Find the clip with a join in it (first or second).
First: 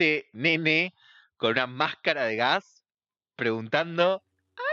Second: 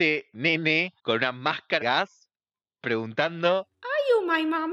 second